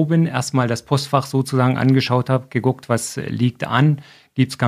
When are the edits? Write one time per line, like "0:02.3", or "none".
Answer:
none